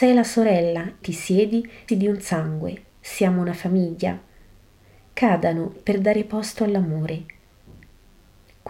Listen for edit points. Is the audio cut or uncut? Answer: cut